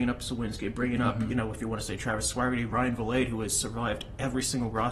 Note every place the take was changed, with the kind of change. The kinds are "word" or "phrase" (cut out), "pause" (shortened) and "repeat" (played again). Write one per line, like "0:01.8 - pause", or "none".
none